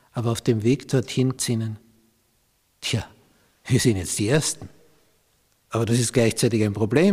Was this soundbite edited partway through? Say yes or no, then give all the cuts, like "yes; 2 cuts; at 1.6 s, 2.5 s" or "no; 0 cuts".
yes; 1 cut; at 1.4 s